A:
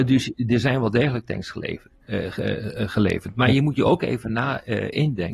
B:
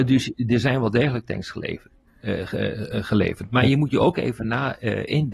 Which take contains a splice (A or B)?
A